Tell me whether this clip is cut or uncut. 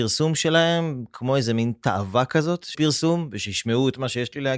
cut